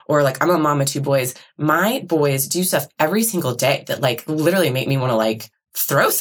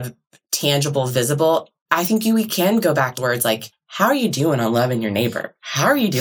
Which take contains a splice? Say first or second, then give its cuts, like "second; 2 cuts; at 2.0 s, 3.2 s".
second; 1 cut; at 3.2 s